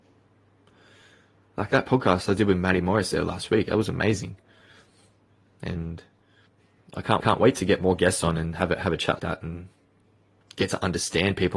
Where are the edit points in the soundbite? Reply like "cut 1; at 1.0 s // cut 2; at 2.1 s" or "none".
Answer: cut 1; at 7.2 s // cut 2; at 9.2 s // cut 3; at 10.0 s